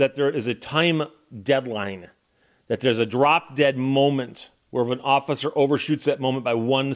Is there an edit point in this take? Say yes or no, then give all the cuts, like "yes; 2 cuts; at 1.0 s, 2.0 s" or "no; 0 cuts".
no; 0 cuts